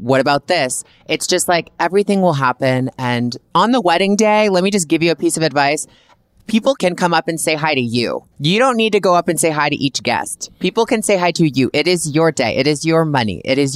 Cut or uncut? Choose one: cut